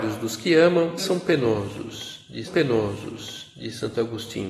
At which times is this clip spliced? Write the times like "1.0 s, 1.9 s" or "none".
1.0 s, 2.5 s